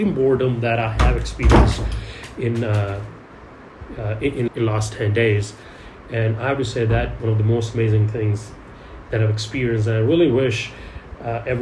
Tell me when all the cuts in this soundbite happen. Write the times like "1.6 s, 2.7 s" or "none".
4.5 s, 7.2 s